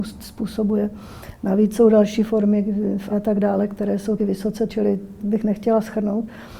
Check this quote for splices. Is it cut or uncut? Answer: cut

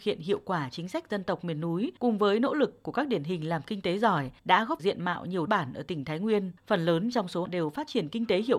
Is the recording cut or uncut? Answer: cut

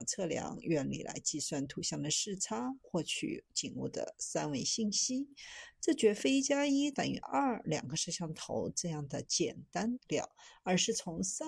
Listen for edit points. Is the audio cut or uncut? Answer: cut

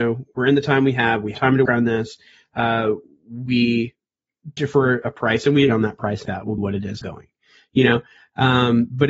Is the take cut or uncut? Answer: cut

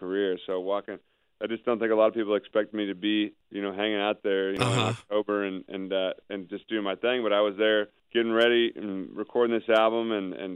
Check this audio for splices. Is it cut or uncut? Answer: uncut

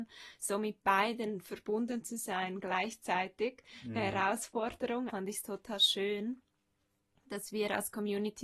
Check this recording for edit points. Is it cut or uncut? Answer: cut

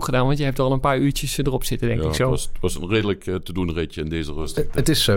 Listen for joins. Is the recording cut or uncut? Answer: uncut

